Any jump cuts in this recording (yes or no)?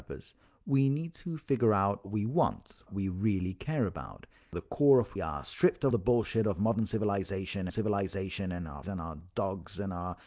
yes